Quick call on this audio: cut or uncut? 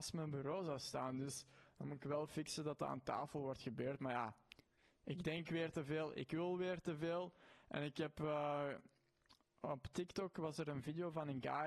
uncut